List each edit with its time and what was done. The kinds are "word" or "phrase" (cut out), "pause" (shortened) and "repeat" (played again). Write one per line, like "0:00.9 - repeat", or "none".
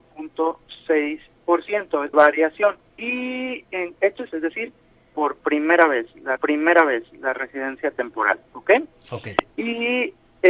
0:02.1 - word
0:02.9 - pause
0:04.0 - word
0:04.3 - word
0:06.4 - repeat
0:08.5 - pause

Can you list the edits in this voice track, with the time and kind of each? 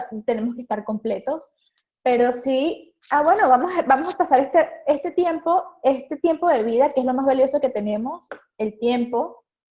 0:03.0 - pause

